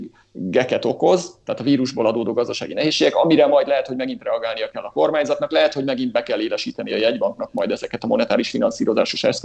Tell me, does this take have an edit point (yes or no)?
no